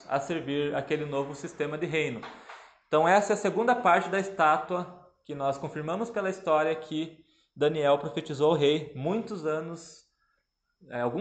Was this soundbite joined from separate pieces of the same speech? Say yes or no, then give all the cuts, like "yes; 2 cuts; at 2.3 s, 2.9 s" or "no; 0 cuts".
no; 0 cuts